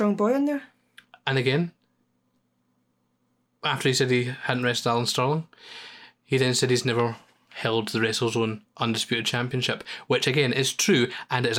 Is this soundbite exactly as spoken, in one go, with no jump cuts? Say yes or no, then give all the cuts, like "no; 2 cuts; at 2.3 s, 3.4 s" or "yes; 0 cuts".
yes; 0 cuts